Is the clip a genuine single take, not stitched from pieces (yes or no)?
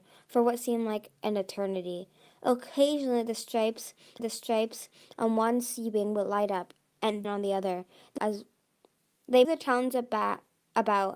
no